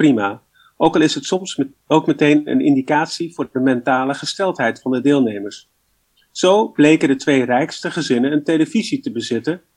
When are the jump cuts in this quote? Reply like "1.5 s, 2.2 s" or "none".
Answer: none

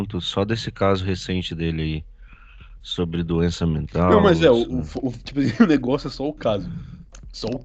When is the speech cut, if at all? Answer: none

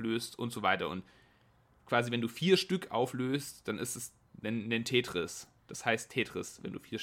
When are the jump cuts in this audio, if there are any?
none

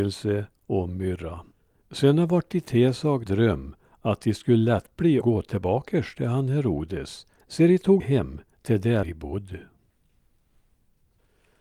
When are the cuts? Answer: 1.5 s, 3.3 s, 5.2 s, 7.4 s, 8.0 s, 9.0 s

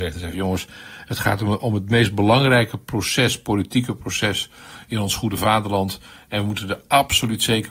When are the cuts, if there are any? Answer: none

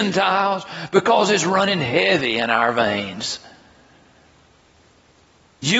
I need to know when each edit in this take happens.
none

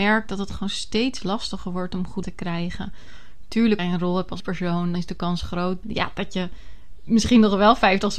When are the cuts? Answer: 2.2 s, 3.8 s, 4.4 s, 4.9 s, 5.8 s

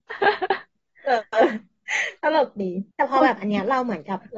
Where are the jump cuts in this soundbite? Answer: 2.9 s

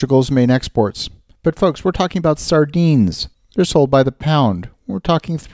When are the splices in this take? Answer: 1.3 s

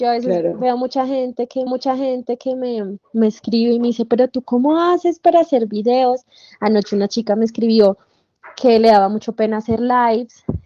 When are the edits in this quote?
1.7 s

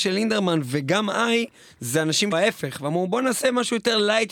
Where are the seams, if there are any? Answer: 2.3 s

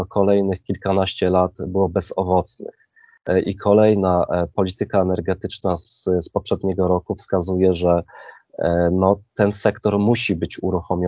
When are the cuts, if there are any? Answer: none

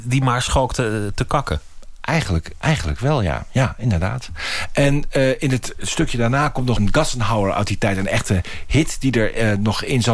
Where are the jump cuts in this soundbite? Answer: 6.8 s

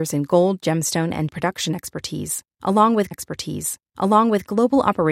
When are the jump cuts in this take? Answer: 1.3 s, 3.1 s

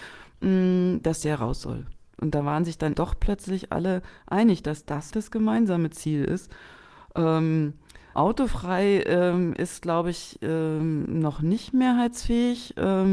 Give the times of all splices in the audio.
2.9 s, 5.1 s, 8.1 s

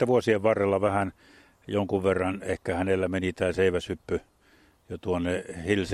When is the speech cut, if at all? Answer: none

